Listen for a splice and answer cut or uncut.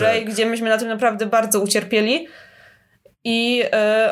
uncut